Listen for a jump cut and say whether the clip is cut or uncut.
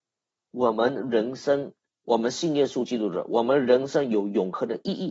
cut